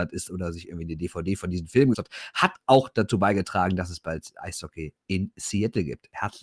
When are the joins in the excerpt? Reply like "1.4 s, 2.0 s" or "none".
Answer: 1.9 s